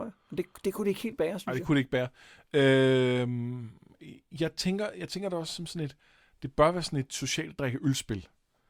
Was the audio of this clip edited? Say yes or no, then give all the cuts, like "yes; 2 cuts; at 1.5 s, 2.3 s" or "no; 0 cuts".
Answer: no; 0 cuts